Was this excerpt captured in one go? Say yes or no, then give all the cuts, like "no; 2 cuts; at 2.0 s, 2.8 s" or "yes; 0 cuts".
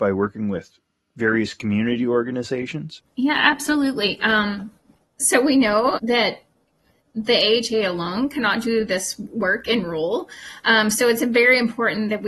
no; 1 cut; at 6.0 s